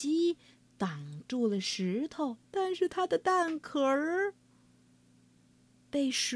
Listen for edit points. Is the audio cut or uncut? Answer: cut